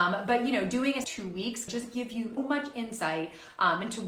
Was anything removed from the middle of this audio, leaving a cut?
yes; 3 cuts; at 1.0 s, 1.7 s, 2.4 s

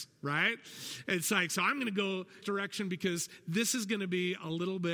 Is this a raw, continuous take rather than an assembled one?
no; 1 cut; at 2.4 s

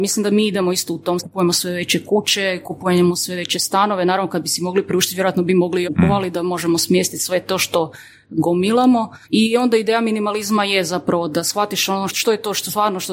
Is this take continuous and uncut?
no; 4 cuts; at 1.2 s, 5.8 s, 9.2 s, 12.1 s

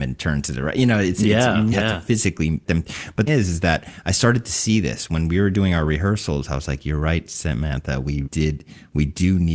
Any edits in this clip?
yes; 4 cuts; at 1.7 s, 2.7 s, 3.3 s, 8.2 s

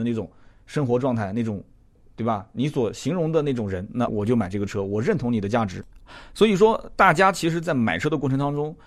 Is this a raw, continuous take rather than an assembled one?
no; 1 cut; at 4.1 s

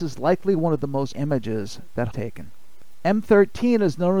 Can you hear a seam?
yes; 2 cuts; at 1.1 s, 2.1 s

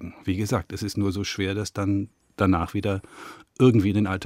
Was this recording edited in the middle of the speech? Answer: no; 0 cuts

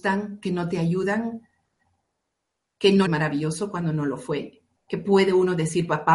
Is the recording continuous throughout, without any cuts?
no; 1 cut; at 3.1 s

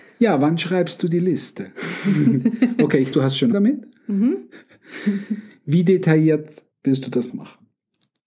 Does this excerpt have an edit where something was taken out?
yes; 4 cuts; at 3.1 s, 3.5 s, 6.7 s, 7.3 s

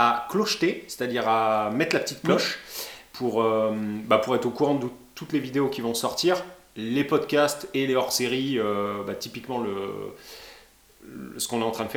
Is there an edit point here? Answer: no; 0 cuts

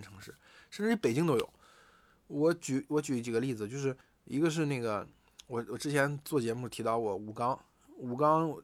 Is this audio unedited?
no; 1 cut; at 4.0 s

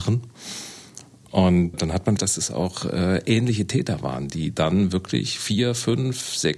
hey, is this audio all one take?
no; 2 cuts; at 1.7 s, 2.2 s

